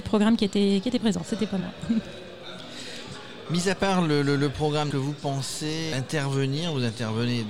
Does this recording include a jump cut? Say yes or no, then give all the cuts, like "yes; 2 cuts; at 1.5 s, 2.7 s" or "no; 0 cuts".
yes; 2 cuts; at 4.9 s, 5.9 s